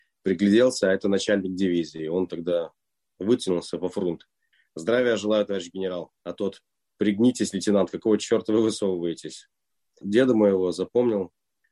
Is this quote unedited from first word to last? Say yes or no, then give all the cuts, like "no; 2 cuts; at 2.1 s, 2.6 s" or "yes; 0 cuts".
no; 1 cut; at 6.2 s